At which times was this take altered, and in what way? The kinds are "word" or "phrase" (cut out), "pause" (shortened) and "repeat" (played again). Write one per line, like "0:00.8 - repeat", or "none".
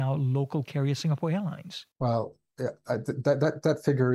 0:01.9 - pause